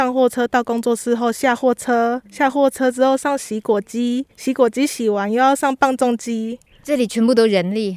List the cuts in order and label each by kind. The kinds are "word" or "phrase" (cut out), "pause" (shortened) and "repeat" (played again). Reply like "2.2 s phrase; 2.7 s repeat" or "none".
2.3 s pause; 4.3 s pause

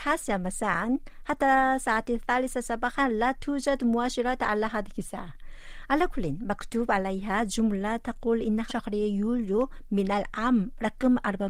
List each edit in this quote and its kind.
8.7 s phrase

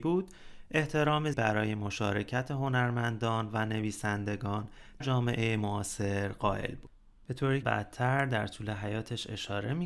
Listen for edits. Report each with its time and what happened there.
1.3 s word; 5.0 s word; 7.6 s word

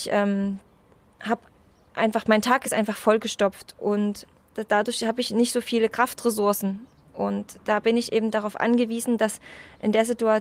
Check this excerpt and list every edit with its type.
none

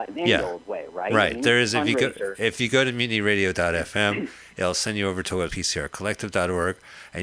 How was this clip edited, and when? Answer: 5.5 s phrase

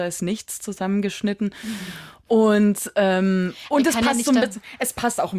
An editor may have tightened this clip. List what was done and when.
none

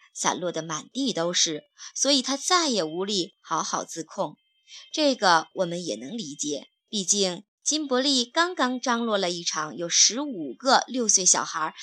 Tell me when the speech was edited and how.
6.8 s pause

